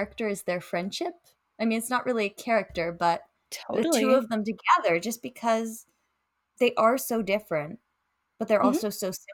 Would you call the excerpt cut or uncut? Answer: uncut